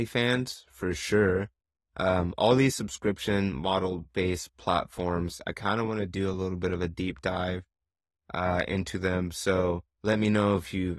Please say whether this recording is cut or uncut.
uncut